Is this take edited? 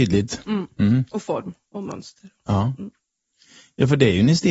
no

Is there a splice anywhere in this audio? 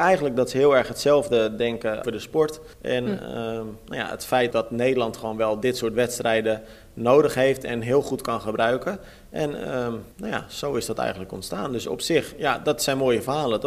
yes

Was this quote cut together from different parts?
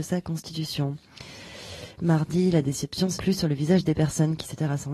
yes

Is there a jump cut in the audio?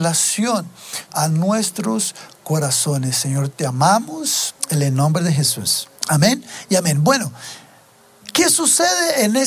yes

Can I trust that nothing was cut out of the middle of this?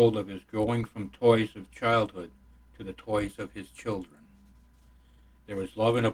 yes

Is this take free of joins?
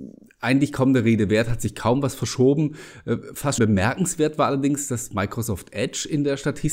no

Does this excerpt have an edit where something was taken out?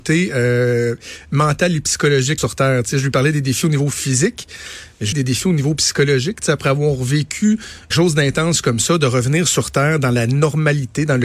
yes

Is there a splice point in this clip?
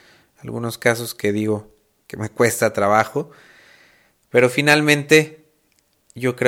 no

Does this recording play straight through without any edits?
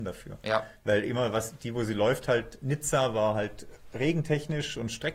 yes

